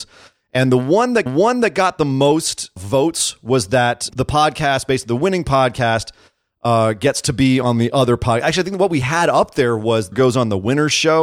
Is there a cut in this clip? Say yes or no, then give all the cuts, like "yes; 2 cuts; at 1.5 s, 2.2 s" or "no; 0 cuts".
yes; 4 cuts; at 1.3 s, 2.8 s, 4.1 s, 10.1 s